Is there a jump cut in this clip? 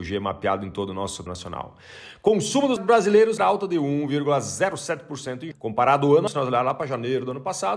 yes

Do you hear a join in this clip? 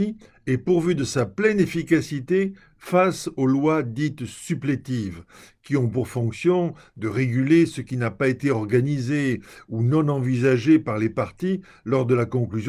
no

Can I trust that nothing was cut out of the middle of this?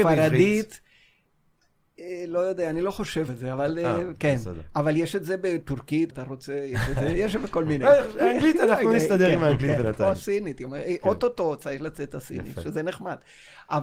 no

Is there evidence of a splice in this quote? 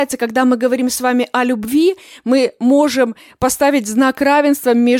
no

